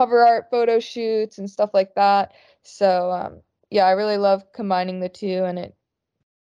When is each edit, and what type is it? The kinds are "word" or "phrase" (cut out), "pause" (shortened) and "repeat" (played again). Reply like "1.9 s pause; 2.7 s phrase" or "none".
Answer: none